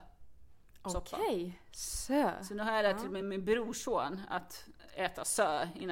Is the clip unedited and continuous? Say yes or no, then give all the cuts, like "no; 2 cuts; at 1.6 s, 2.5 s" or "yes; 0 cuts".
yes; 0 cuts